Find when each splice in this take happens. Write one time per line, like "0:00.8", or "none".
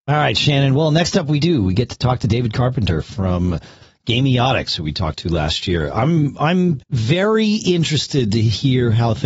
0:06.8